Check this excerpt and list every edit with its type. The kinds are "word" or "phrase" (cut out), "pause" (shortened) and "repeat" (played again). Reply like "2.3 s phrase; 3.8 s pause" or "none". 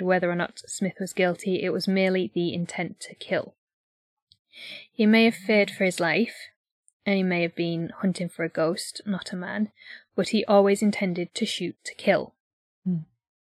none